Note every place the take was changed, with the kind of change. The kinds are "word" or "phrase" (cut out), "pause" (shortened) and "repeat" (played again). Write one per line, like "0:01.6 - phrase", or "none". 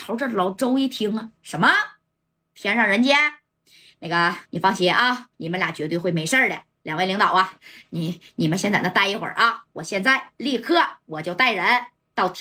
0:01.4 - pause
0:04.5 - pause
0:05.3 - pause